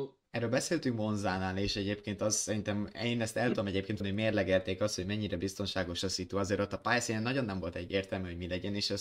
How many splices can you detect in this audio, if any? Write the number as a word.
one